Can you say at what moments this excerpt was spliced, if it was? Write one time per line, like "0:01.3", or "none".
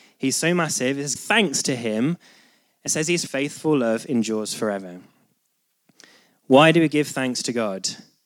0:01.2
0:02.9
0:03.3

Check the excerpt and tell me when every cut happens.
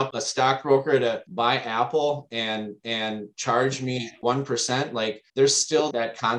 0:02.8
0:05.3

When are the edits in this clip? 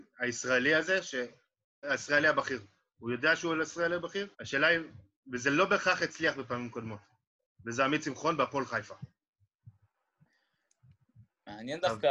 0:01.8
0:04.3

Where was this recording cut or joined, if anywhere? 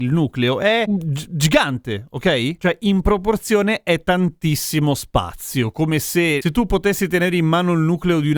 none

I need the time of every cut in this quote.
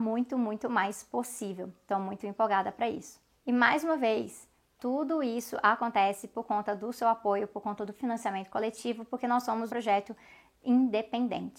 0:09.7

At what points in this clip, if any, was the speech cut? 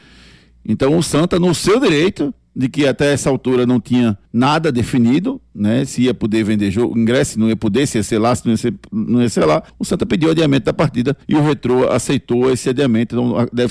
0:04.3
0:09.7
0:11.2

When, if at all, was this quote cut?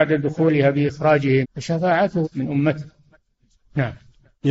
0:01.4
0:02.2

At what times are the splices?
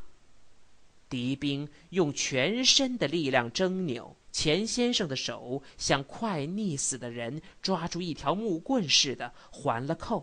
0:04.2

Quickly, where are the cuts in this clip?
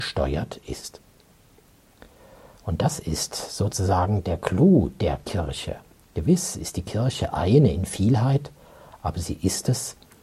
none

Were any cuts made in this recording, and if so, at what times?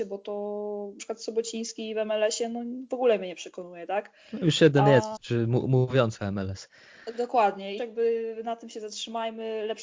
0:01.0
0:05.2
0:07.8

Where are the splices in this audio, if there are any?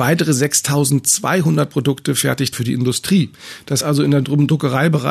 0:02.5
0:03.8

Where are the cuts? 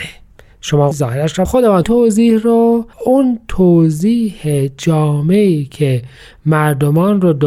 0:00.9
0:01.5
0:01.8
0:02.9

